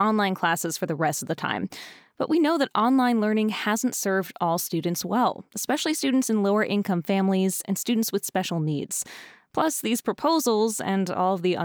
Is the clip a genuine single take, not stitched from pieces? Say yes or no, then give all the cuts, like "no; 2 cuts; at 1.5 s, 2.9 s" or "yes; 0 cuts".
yes; 0 cuts